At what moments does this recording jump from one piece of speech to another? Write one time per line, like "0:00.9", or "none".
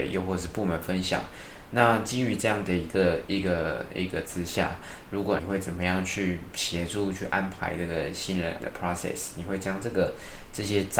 0:04.2
0:05.4
0:08.6